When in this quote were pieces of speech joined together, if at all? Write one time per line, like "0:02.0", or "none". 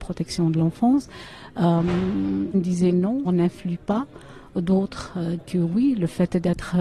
0:02.5
0:03.2
0:05.4